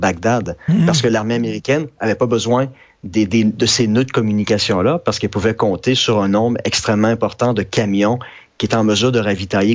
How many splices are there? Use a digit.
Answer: 0